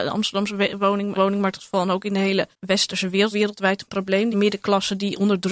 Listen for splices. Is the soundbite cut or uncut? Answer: cut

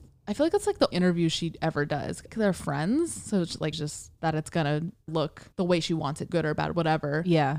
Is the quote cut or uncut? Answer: cut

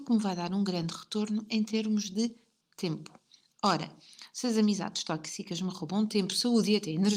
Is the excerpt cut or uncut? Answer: uncut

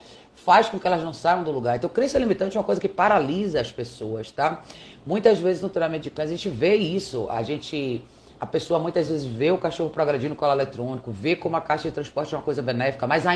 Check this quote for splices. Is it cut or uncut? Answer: uncut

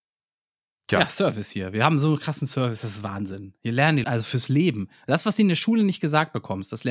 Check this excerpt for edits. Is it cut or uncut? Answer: cut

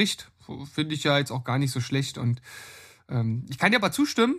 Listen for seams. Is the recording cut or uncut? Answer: uncut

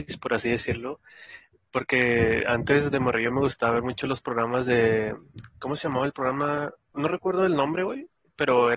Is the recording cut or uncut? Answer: uncut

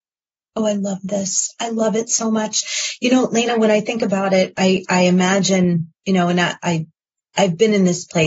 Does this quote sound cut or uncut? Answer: uncut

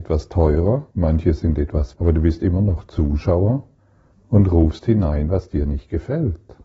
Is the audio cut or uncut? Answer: cut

